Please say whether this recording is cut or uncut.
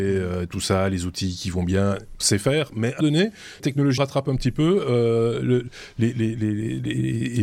cut